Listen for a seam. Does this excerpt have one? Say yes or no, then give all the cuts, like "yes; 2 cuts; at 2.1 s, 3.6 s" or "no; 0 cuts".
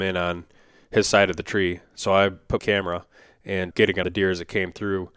yes; 3 cuts; at 2.6 s, 3.7 s, 4.0 s